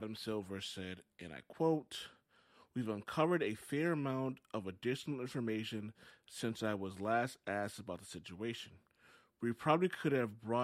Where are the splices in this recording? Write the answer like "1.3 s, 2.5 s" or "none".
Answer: none